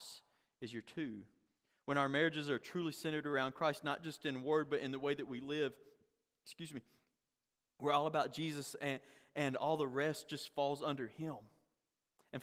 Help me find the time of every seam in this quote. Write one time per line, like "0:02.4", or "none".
none